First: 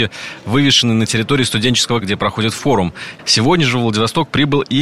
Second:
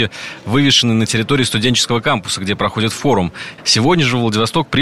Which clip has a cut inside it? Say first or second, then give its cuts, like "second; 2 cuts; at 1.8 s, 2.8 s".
first; 1 cut; at 2.0 s